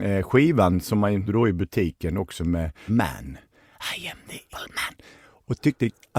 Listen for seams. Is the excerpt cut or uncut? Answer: cut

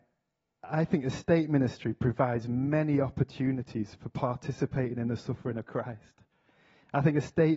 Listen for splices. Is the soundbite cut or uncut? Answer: uncut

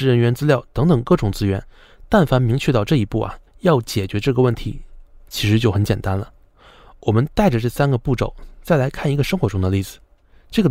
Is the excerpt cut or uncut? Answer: cut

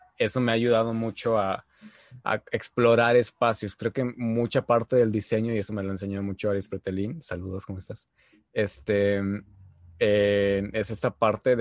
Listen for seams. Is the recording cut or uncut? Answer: uncut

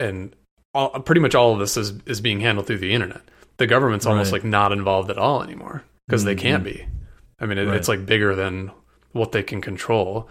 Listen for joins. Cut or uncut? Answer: uncut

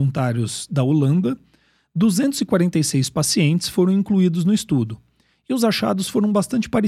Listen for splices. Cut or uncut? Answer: uncut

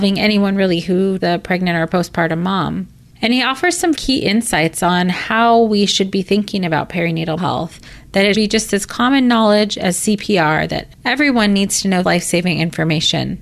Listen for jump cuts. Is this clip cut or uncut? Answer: cut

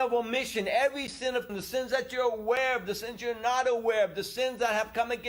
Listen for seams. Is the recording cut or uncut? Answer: cut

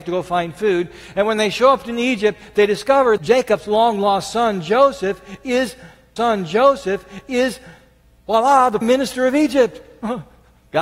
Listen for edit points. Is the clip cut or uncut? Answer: cut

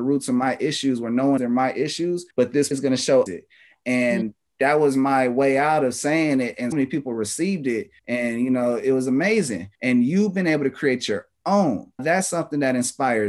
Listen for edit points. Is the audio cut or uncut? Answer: cut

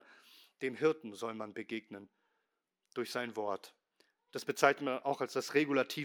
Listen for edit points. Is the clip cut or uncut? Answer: uncut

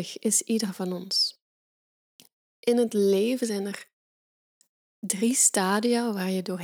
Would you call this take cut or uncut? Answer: uncut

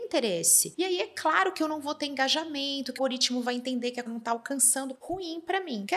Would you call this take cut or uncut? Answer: cut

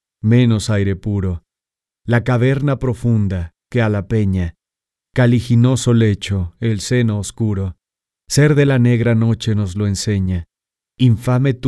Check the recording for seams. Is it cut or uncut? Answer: uncut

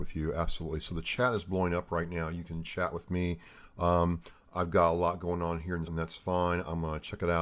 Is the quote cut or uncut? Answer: cut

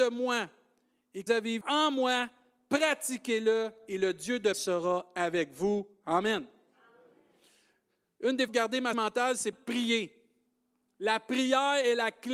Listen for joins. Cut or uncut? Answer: cut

